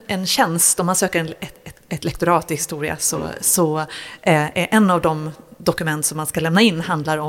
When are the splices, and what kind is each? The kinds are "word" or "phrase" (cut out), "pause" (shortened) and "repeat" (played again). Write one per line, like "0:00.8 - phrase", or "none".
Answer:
none